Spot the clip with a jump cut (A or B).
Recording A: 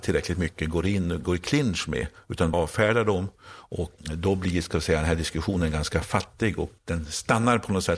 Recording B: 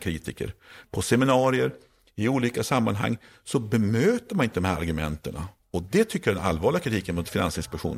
A